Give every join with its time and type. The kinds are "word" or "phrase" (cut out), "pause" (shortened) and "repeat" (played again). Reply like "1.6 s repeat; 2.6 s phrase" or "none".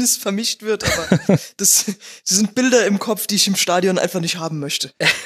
none